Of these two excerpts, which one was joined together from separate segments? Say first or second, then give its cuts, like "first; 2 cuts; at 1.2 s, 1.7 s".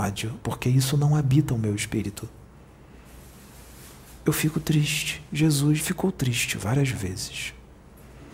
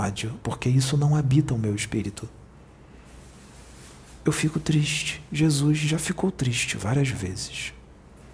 first; 1 cut; at 5.8 s